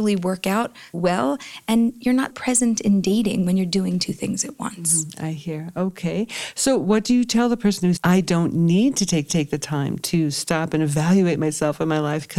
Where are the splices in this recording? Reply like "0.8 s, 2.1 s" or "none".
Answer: 0.9 s, 2.3 s, 8.0 s, 9.3 s